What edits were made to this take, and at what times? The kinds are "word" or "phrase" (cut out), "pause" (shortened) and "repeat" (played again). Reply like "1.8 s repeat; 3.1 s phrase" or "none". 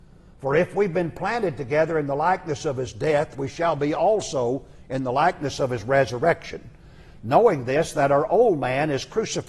none